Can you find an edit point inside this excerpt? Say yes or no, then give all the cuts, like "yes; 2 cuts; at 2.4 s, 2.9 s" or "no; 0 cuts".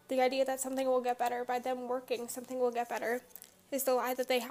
no; 0 cuts